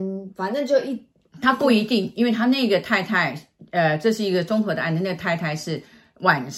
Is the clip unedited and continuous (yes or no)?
yes